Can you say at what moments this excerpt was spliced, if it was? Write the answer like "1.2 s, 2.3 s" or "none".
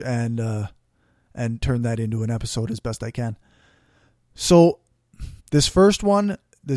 5.4 s